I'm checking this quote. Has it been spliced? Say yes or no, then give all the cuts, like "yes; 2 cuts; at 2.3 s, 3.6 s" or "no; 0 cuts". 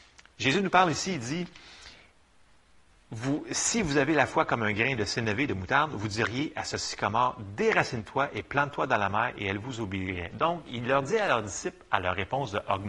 no; 0 cuts